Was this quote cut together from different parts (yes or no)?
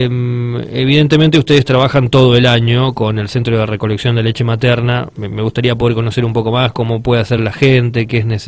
no